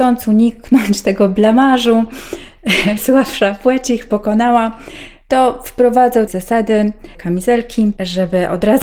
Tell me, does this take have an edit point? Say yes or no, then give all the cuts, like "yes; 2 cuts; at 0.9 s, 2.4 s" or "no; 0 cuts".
yes; 3 cuts; at 3.0 s, 6.3 s, 7.1 s